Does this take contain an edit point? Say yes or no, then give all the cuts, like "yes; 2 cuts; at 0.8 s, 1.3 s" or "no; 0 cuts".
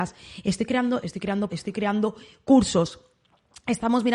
yes; 2 cuts; at 1.0 s, 1.5 s